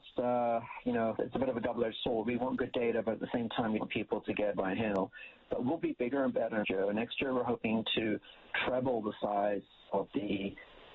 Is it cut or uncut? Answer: cut